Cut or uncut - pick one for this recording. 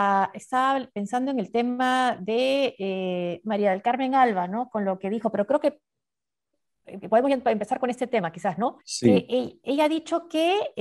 cut